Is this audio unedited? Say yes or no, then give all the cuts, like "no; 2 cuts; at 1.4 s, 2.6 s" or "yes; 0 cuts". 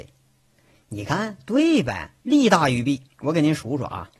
no; 2 cuts; at 2.2 s, 3.1 s